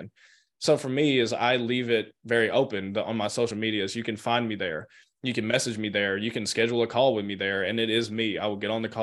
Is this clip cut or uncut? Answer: uncut